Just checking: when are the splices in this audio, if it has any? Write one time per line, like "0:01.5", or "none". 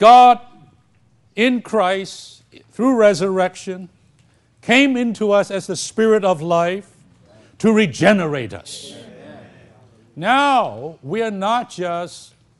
none